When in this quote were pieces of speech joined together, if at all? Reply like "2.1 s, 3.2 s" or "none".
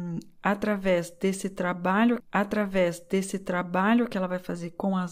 2.2 s

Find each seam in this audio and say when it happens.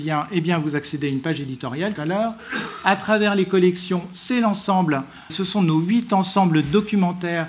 2.0 s, 5.3 s

